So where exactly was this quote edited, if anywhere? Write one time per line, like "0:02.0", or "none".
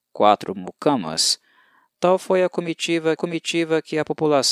0:03.2